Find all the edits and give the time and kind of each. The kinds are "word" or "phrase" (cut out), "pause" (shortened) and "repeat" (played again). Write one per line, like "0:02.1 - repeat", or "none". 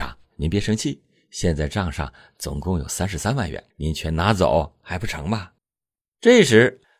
0:03.7 - pause
0:05.6 - pause